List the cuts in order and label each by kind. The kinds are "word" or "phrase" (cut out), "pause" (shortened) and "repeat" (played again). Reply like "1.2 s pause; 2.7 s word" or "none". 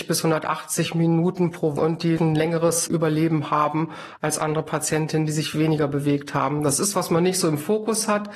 1.8 s phrase; 2.2 s word; 6.9 s word

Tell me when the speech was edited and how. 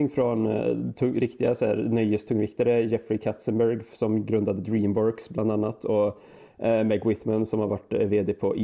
none

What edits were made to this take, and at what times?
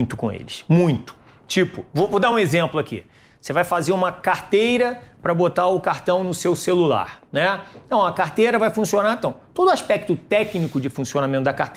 none

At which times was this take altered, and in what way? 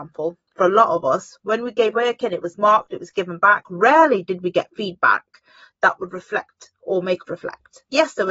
1.9 s word; 7.3 s word

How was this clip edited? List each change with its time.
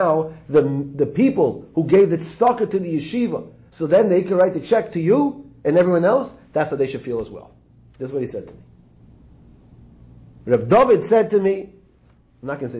none

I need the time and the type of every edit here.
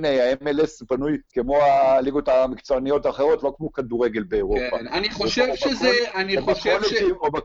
1.3 s pause

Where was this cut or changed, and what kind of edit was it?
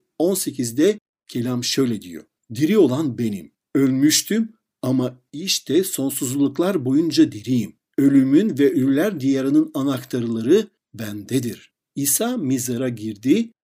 none

